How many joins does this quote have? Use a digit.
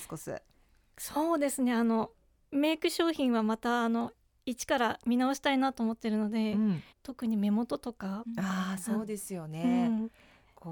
1